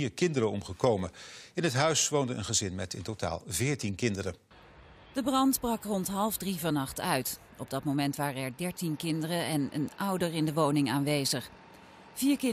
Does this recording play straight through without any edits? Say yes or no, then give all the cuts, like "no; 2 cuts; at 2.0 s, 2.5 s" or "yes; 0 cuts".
yes; 0 cuts